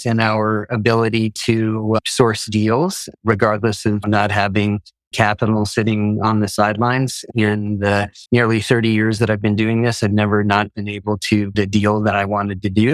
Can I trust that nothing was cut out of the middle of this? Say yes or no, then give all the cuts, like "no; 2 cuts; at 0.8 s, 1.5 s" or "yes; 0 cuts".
no; 3 cuts; at 5.1 s, 8.3 s, 11.5 s